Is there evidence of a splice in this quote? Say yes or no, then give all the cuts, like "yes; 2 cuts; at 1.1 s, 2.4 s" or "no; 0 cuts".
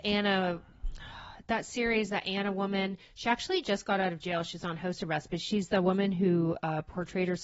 no; 0 cuts